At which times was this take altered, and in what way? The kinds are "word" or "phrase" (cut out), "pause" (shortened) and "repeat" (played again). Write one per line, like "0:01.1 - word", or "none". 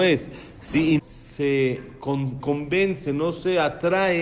0:01.0 - word
0:02.4 - word